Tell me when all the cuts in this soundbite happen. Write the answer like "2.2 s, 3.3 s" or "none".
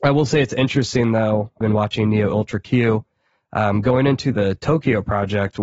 1.6 s